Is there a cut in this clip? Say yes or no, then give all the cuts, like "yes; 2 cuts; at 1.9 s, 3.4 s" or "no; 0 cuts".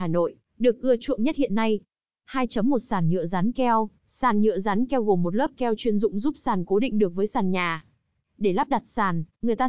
yes; 1 cut; at 4.0 s